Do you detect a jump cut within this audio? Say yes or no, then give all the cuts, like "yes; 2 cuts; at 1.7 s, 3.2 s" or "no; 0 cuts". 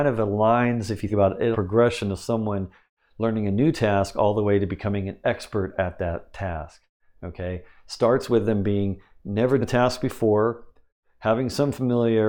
yes; 3 cuts; at 1.1 s, 1.5 s, 9.6 s